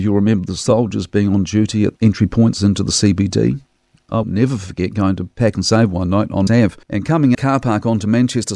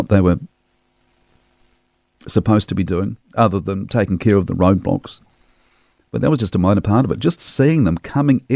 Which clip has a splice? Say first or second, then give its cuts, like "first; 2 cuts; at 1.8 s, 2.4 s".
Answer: first; 5 cuts; at 1.9 s, 4.2 s, 6.5 s, 6.8 s, 7.3 s